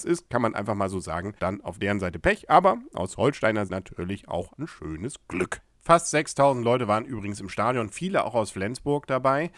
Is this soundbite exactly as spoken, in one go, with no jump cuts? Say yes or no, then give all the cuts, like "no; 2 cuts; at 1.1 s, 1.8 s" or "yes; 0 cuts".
no; 3 cuts; at 1.4 s, 3.7 s, 4.5 s